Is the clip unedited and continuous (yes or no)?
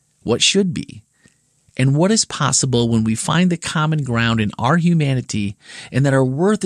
yes